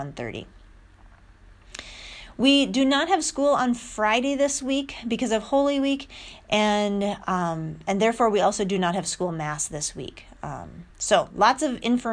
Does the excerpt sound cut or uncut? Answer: cut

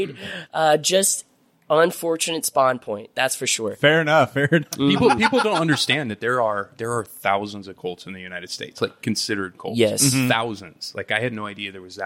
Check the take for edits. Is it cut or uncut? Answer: uncut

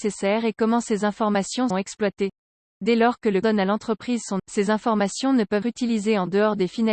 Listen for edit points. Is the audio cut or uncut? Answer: cut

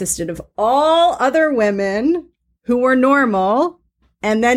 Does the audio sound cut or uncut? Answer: uncut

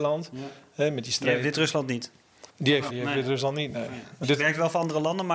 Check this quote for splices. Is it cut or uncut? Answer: cut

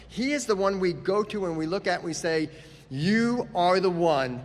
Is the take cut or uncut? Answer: uncut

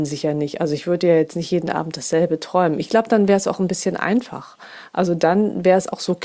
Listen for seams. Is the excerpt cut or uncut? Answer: uncut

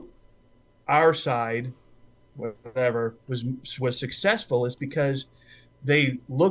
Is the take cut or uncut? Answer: uncut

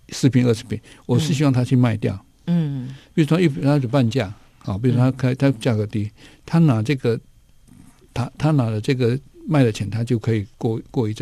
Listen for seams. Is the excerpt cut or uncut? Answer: uncut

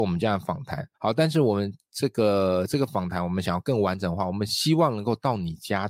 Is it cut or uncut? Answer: cut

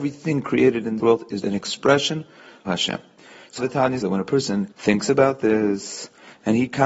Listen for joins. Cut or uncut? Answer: cut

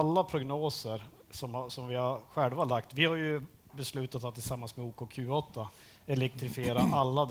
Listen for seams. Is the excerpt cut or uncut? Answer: uncut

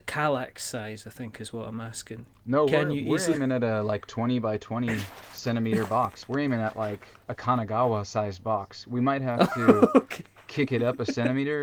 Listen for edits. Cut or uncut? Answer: cut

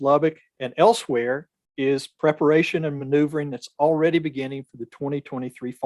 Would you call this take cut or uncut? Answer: uncut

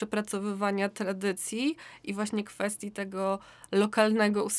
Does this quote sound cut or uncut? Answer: uncut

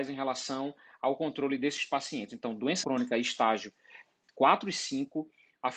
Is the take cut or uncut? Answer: cut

